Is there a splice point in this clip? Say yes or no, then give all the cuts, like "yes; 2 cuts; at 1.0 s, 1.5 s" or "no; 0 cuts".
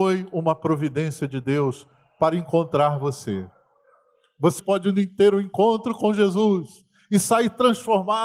yes; 1 cut; at 4.6 s